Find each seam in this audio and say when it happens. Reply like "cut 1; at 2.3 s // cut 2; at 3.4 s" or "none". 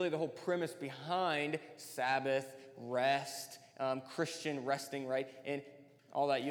none

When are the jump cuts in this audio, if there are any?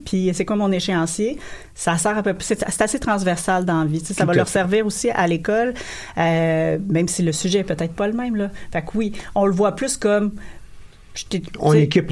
none

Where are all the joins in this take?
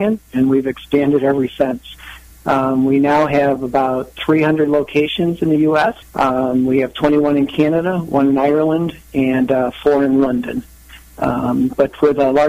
none

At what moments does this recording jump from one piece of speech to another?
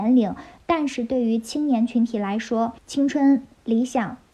cut 1; at 2.8 s

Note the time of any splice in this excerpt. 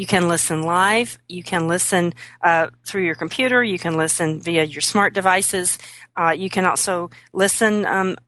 none

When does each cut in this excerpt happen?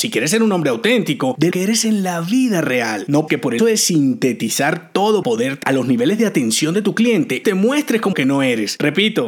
cut 1; at 1.5 s // cut 2; at 3.3 s // cut 3; at 3.6 s // cut 4; at 5.2 s // cut 5; at 5.6 s // cut 6; at 7.4 s // cut 7; at 8.1 s

